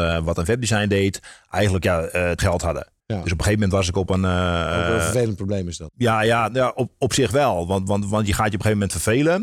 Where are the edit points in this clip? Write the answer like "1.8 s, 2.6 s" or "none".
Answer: 2.4 s, 3.0 s